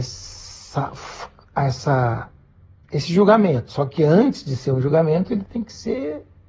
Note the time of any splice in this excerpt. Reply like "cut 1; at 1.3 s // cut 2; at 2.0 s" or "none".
none